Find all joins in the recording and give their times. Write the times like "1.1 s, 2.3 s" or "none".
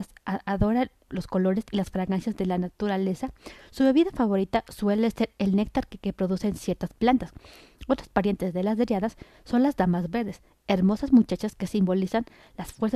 1.1 s